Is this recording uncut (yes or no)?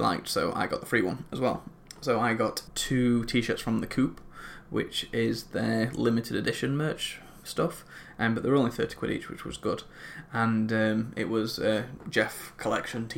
yes